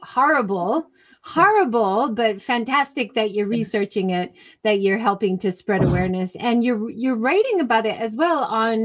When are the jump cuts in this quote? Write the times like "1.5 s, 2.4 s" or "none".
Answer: none